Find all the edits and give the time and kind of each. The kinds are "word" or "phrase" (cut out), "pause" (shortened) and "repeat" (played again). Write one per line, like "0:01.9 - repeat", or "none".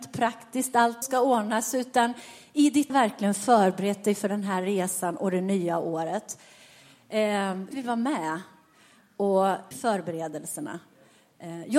0:01.0 - word
0:02.9 - word
0:07.7 - word
0:09.7 - word